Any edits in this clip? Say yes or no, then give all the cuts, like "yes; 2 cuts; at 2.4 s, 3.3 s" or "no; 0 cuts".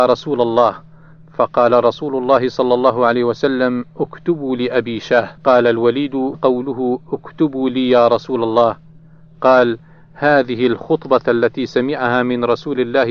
yes; 2 cuts; at 5.4 s, 6.3 s